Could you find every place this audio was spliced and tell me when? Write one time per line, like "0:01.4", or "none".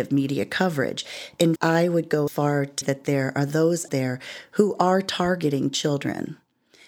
0:01.6
0:02.3
0:02.8
0:03.9